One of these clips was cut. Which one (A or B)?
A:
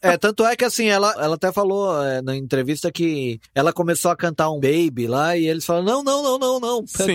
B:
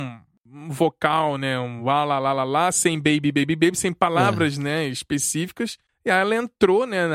A